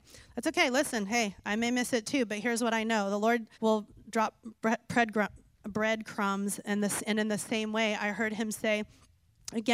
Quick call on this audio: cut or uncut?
cut